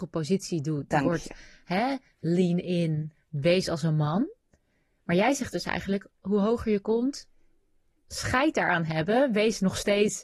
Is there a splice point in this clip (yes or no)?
no